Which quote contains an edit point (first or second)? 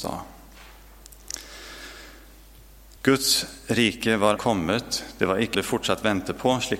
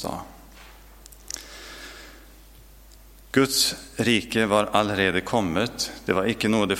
first